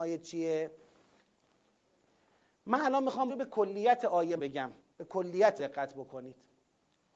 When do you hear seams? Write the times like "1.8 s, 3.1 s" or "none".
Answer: 3.3 s, 4.4 s, 4.8 s, 5.6 s

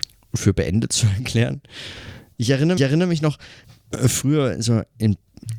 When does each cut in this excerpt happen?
2.8 s, 3.6 s

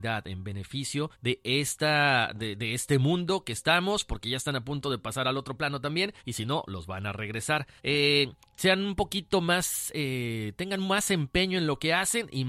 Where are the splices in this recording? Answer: 1.1 s, 6.2 s, 7.8 s

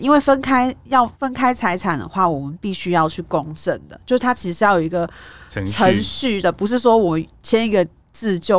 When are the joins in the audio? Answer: 1.1 s

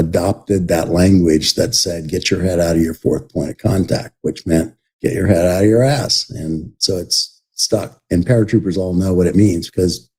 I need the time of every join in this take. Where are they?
4.8 s

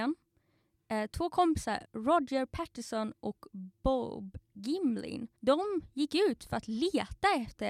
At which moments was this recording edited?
5.4 s

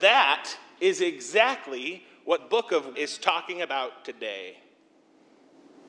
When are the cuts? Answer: 2.4 s, 2.9 s

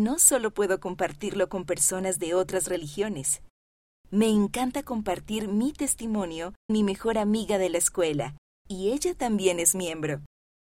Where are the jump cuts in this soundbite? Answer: 6.7 s

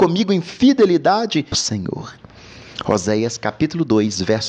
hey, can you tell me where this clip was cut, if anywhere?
1.5 s

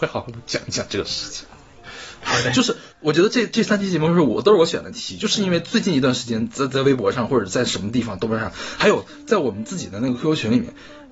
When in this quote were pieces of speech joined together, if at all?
2.9 s

